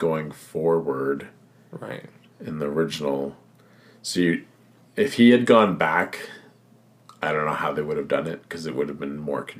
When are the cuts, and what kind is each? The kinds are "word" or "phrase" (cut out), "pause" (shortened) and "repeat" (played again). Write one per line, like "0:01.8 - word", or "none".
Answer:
none